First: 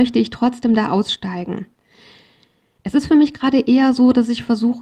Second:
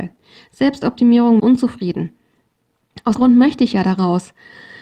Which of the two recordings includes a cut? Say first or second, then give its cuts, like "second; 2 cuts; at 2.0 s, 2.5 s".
second; 2 cuts; at 1.4 s, 3.2 s